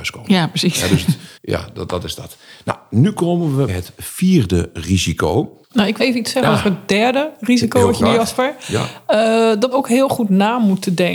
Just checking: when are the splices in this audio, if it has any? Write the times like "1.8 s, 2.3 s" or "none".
1.4 s, 3.7 s, 5.6 s, 6.0 s, 8.0 s, 9.7 s